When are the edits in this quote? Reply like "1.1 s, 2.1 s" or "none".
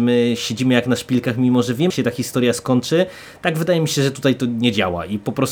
1.9 s